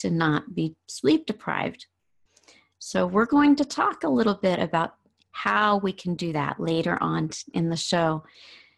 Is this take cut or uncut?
uncut